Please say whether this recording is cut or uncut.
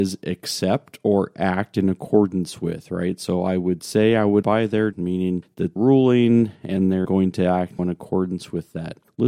cut